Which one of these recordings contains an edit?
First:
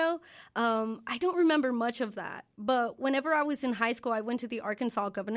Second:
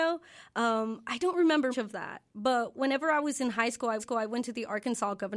second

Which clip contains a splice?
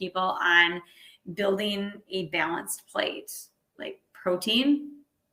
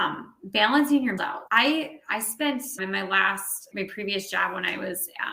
second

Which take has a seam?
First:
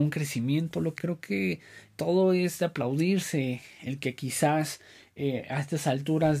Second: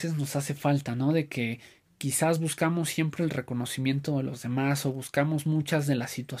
first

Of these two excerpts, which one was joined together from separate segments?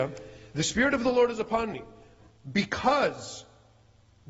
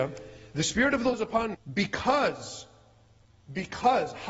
second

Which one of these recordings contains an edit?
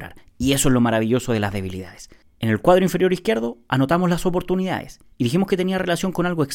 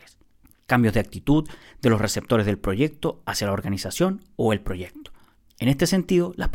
first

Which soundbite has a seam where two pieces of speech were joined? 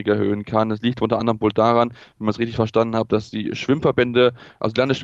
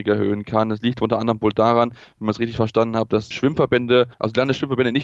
second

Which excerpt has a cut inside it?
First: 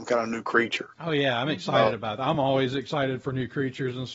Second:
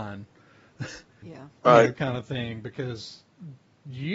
second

